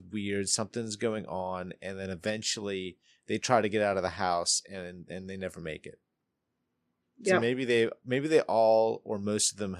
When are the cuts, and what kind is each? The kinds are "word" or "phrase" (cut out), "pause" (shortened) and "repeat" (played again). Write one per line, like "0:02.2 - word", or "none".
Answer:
none